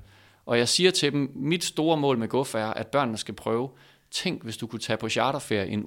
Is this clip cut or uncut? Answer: uncut